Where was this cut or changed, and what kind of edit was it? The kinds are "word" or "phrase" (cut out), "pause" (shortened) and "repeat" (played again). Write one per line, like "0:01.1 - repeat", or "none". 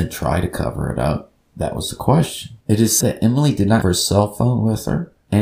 0:01.4 - pause
0:02.6 - pause
0:03.0 - word
0:03.8 - word